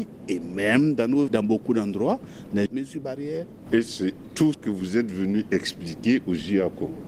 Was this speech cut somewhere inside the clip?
yes; 3 cuts; at 1.3 s, 2.7 s, 4.5 s

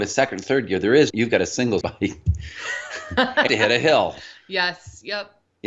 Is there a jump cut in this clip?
yes; 3 cuts; at 1.1 s, 1.8 s, 3.5 s

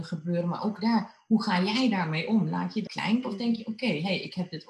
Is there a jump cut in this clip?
yes; 2 cuts; at 2.9 s, 3.2 s

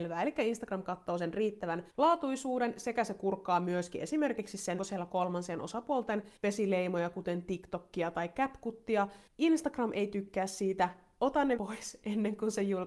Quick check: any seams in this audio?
yes; 5 cuts; at 1.9 s, 4.8 s, 6.4 s, 9.3 s, 11.6 s

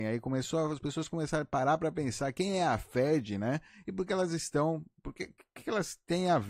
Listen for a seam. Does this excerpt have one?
no; 0 cuts

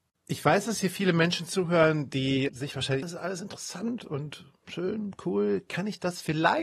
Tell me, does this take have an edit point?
yes; 3 cuts; at 2.5 s, 3.0 s, 4.0 s

